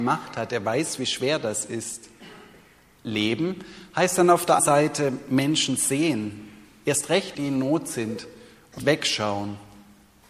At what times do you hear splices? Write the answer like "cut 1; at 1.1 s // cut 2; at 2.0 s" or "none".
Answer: cut 1; at 4.6 s // cut 2; at 7.3 s // cut 3; at 8.8 s